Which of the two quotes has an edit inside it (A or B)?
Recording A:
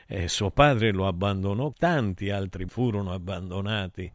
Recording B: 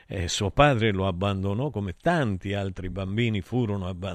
A